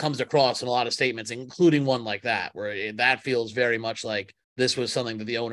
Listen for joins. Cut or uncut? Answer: cut